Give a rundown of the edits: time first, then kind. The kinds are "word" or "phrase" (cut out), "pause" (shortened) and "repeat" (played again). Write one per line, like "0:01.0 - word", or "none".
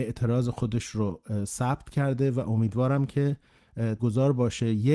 0:04.0 - word